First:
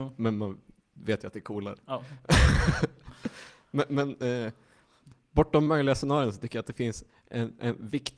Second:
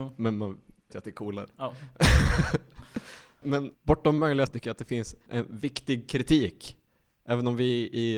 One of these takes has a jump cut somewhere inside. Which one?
second; 5 cuts; at 0.9 s, 3.4 s, 3.7 s, 4.5 s, 5.3 s

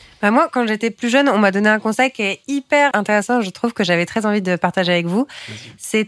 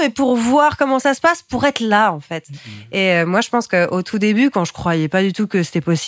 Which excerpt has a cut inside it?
first; 1 cut; at 2.9 s

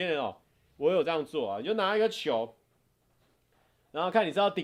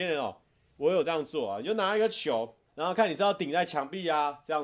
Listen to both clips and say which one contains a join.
second; 1 cut; at 2.7 s

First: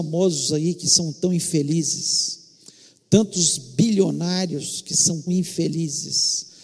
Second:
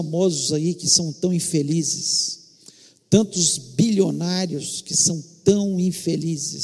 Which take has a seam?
first; 1 cut; at 5.3 s

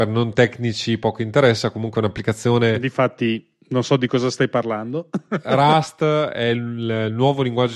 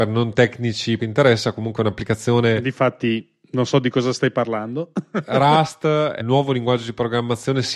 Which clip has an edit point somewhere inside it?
second; 2 cuts; at 1.0 s, 6.2 s

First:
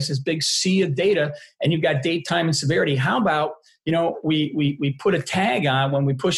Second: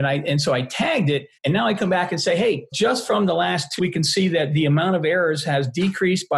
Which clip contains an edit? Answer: second; 3 cuts; at 1.4 s, 2.7 s, 3.8 s

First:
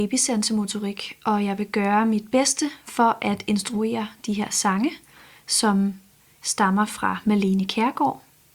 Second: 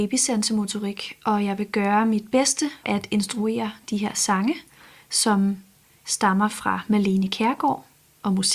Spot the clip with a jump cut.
second; 1 cut; at 2.8 s

